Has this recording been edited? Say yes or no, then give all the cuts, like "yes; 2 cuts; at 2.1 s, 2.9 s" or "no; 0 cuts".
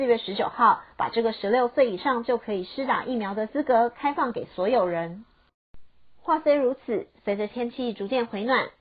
no; 0 cuts